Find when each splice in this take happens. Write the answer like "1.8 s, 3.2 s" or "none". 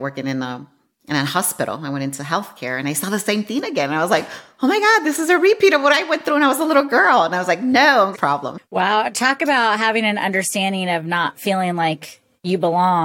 8.1 s